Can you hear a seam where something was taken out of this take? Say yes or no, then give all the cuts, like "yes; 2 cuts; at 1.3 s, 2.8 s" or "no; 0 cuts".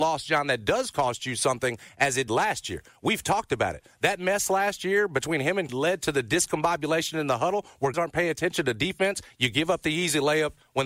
yes; 3 cuts; at 2.3 s, 5.7 s, 7.9 s